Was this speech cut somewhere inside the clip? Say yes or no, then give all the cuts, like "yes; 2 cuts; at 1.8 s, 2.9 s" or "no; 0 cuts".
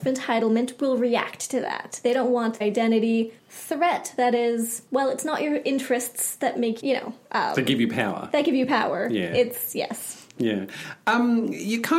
yes; 4 cuts; at 2.6 s, 3.4 s, 4.9 s, 6.8 s